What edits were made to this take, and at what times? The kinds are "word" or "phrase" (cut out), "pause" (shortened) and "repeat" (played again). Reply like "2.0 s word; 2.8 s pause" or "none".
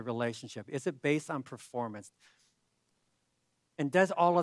none